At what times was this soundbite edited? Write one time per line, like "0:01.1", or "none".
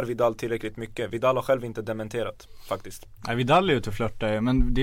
none